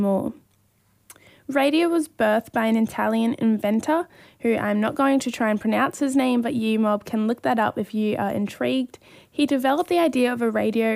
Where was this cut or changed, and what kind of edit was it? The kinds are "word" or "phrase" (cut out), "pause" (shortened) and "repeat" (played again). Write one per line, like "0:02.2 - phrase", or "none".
none